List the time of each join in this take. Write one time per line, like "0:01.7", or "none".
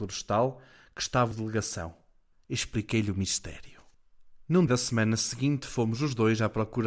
0:01.3
0:04.7